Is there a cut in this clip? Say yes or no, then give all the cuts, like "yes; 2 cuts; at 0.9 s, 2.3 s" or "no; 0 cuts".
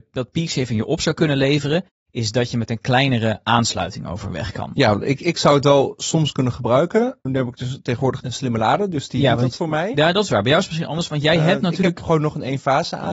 yes; 2 cuts; at 7.3 s, 8.2 s